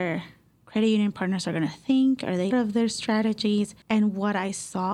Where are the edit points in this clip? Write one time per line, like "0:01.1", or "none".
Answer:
0:02.5
0:03.8